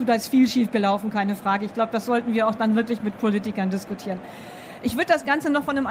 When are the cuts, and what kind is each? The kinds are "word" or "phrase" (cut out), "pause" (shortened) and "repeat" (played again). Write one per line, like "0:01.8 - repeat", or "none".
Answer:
none